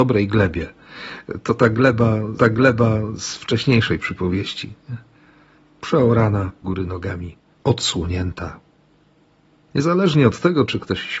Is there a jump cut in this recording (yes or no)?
yes